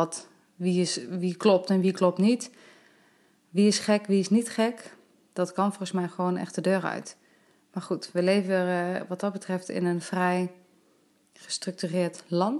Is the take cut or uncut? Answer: uncut